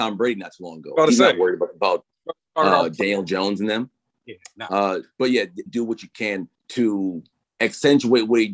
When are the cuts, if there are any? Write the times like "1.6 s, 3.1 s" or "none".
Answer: 5.7 s, 6.6 s

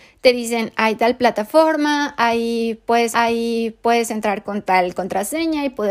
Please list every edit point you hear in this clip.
3.1 s

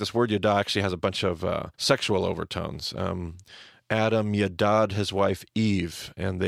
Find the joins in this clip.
1.7 s

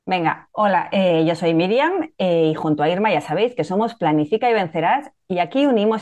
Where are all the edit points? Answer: none

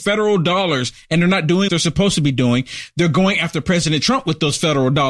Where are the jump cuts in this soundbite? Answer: 1.7 s

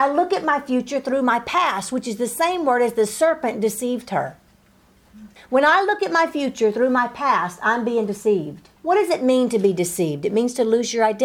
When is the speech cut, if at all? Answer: 5.4 s, 8.8 s

